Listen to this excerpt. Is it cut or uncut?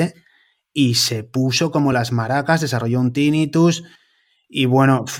uncut